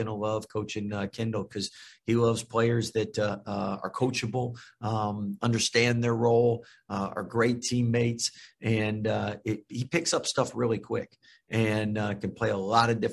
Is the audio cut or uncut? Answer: uncut